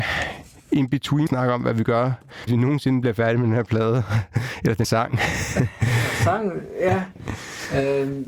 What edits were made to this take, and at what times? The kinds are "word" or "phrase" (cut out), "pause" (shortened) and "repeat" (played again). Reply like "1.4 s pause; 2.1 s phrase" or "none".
1.3 s word; 2.5 s word; 4.8 s word